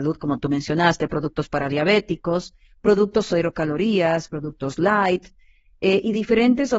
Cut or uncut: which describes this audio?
uncut